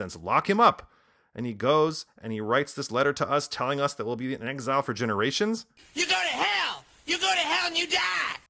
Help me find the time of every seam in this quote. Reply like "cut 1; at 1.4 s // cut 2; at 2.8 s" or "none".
none